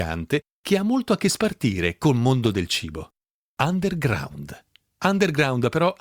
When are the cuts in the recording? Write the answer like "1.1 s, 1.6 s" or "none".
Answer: none